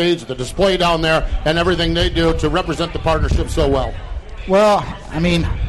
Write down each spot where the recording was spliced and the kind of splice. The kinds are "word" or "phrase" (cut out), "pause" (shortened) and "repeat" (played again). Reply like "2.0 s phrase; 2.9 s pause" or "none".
none